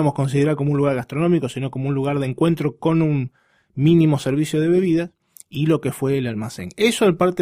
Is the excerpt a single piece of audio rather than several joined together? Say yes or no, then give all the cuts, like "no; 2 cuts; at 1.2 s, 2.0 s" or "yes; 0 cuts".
yes; 0 cuts